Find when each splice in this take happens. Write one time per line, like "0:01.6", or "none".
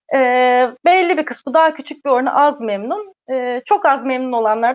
none